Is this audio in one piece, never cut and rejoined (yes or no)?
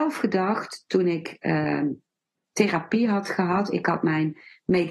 yes